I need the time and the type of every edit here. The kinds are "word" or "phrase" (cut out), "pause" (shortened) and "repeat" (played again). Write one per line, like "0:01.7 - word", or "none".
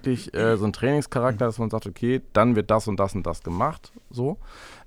none